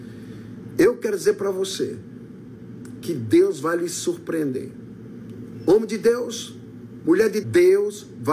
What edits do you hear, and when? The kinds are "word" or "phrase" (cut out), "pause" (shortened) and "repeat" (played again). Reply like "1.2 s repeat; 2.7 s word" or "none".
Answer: 7.4 s word